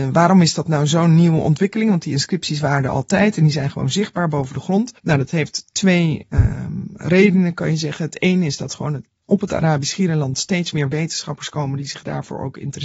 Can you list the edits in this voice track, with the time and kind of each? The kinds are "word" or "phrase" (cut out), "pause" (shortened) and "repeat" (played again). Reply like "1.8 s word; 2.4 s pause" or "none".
5.0 s pause